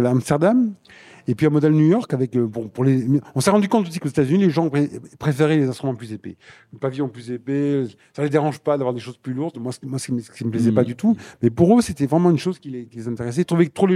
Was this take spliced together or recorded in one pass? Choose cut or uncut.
uncut